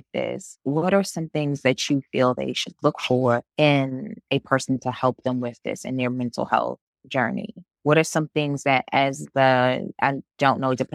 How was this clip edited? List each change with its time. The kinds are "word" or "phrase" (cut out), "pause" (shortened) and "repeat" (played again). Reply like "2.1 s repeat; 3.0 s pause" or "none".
3.5 s pause; 7.7 s pause; 9.9 s pause